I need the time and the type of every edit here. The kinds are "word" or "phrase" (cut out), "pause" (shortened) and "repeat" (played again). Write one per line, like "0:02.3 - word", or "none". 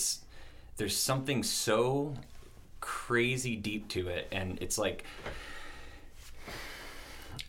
none